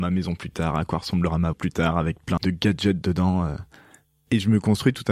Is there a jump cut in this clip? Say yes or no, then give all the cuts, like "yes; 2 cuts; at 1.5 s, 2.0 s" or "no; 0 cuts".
yes; 2 cuts; at 1.5 s, 2.4 s